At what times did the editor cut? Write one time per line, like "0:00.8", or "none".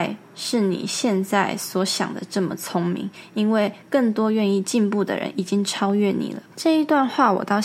0:06.5